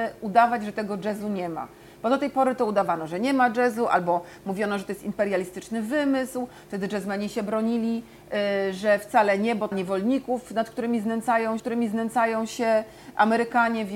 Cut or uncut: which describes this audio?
cut